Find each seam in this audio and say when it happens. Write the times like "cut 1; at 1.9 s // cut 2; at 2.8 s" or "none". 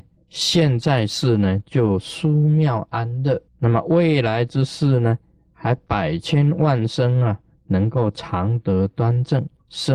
cut 1; at 3.5 s